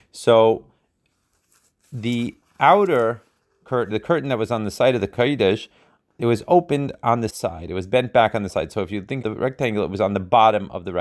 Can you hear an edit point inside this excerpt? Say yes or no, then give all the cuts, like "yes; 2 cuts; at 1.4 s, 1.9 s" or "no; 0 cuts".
yes; 4 cuts; at 3.9 s, 7.3 s, 8.5 s, 9.2 s